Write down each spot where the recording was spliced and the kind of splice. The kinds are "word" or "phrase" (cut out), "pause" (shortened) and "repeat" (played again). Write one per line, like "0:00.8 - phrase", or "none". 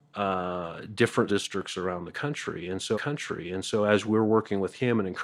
0:01.3 - word
0:02.9 - repeat

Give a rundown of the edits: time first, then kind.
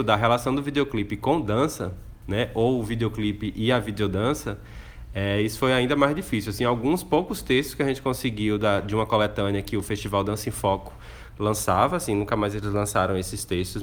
none

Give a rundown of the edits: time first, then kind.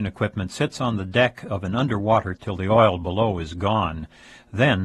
0:02.4 - word

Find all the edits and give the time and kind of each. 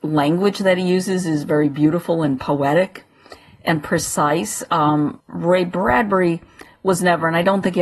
0:05.2 - pause

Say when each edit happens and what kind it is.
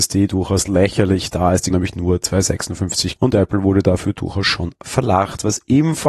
0:01.7 - word
0:03.2 - word

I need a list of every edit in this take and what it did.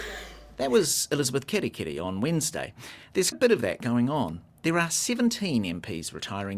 0:03.3 - word

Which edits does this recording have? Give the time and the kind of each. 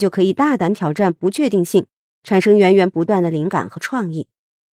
none

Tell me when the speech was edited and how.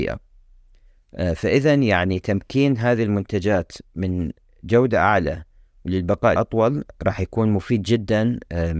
0:06.4 - word

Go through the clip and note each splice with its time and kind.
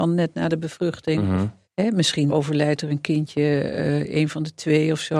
0:01.6 - pause
0:02.3 - word

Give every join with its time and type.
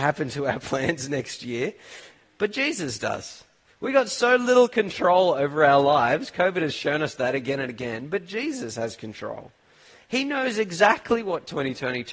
none

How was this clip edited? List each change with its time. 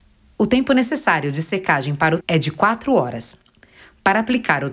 0:02.2 - word

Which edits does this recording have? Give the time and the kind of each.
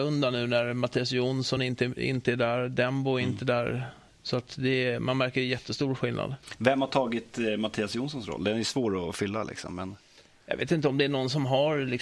none

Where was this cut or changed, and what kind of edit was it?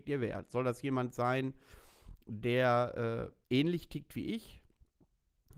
0:03.4 - pause

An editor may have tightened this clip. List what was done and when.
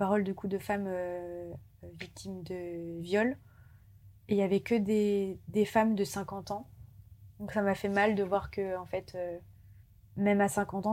none

